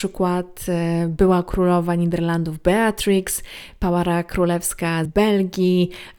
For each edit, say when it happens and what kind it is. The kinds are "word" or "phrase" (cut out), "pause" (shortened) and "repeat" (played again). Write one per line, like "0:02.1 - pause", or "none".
0:05.1 - word

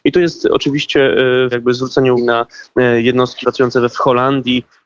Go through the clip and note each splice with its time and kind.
0:01.5 - word
0:02.2 - word
0:03.4 - word
0:03.9 - word

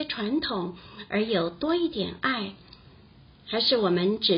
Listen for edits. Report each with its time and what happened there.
none

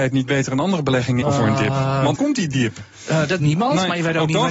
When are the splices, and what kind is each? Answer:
0:01.2 - phrase
0:02.2 - word
0:03.4 - word

